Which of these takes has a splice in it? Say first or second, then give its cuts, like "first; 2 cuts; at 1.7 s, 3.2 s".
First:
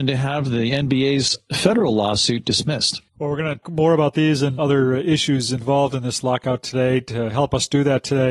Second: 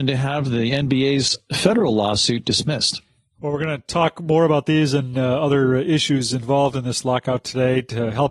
first; 3 cuts; at 3.1 s, 3.6 s, 4.6 s